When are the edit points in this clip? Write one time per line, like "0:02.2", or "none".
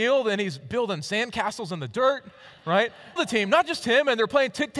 0:03.2